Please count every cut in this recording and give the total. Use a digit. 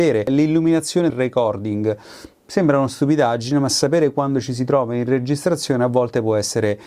1